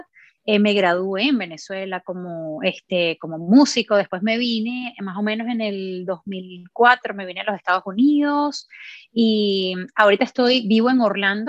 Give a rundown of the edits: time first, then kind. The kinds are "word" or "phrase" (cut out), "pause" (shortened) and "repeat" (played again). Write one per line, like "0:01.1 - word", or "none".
none